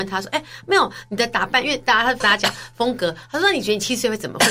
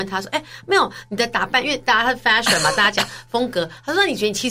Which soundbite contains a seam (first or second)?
first